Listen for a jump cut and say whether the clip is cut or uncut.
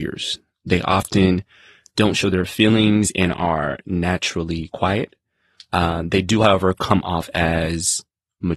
uncut